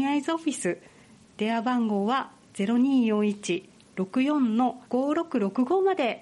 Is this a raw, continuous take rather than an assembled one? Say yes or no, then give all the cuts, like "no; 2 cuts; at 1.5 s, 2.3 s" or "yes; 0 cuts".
no; 1 cut; at 4.9 s